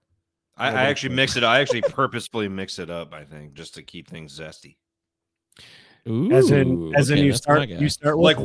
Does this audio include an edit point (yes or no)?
no